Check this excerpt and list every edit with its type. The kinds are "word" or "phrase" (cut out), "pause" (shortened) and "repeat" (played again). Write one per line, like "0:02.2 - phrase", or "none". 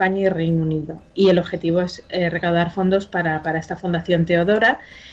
none